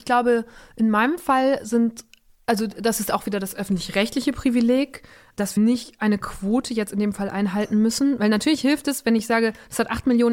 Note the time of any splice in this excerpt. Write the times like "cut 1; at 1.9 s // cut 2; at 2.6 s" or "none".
cut 1; at 5.6 s